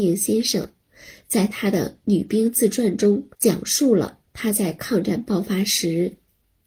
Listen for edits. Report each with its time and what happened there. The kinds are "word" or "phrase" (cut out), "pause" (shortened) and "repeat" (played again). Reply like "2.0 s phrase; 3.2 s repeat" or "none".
3.3 s pause